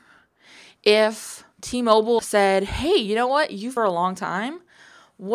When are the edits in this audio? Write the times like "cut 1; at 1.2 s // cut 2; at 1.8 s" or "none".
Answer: cut 1; at 1.5 s // cut 2; at 2.2 s // cut 3; at 3.8 s